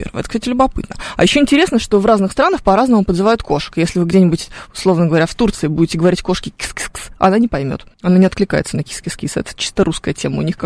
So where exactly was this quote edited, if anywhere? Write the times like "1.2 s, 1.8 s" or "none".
7.9 s